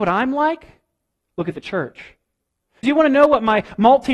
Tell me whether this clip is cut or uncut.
cut